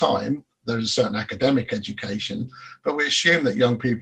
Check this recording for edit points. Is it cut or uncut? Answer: uncut